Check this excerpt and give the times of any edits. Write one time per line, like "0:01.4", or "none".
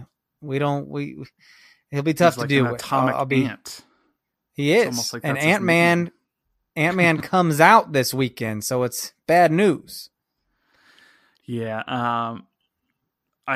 none